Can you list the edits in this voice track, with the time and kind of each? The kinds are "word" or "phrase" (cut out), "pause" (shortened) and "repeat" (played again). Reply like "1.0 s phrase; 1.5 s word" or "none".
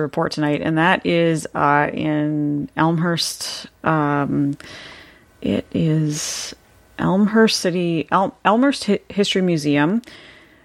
none